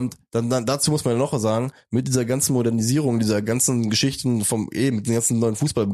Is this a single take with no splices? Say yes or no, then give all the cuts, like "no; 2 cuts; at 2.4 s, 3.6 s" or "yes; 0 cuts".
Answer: yes; 0 cuts